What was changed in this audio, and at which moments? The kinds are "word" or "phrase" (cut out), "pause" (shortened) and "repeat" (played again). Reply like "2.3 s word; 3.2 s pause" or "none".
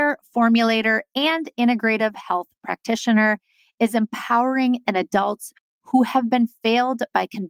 4.9 s word